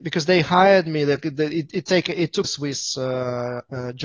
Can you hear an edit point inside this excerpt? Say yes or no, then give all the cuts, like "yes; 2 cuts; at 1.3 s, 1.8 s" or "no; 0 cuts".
yes; 1 cut; at 2.4 s